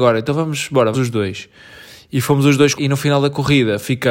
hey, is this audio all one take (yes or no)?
no